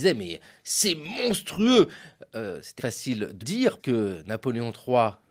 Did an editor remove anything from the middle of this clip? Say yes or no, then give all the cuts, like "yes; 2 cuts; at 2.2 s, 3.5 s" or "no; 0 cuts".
yes; 3 cuts; at 2.8 s, 3.4 s, 3.8 s